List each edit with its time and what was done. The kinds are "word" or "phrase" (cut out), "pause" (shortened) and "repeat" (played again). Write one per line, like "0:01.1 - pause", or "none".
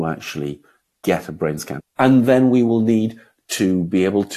none